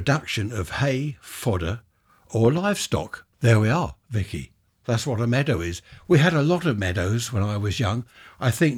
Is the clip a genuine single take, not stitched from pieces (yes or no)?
no